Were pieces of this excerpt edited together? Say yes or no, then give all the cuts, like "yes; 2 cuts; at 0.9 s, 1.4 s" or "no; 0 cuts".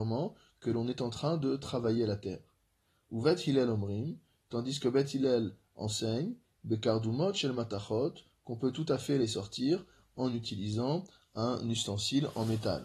no; 0 cuts